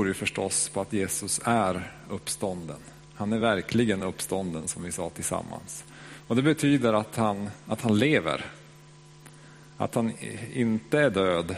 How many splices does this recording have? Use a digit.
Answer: 0